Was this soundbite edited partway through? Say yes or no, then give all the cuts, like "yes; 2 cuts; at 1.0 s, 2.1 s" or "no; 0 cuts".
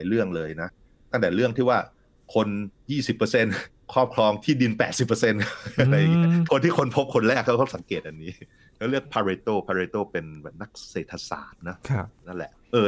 no; 0 cuts